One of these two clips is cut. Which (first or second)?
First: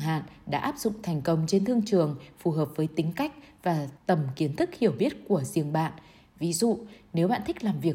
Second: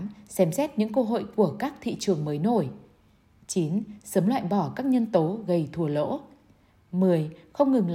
first